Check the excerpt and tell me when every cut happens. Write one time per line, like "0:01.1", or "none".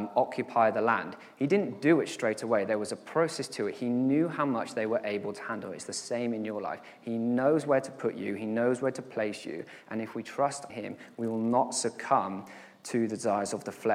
0:10.7